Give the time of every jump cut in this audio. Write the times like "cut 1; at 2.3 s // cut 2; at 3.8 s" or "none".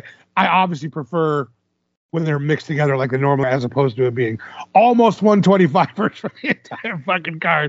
cut 1; at 3.4 s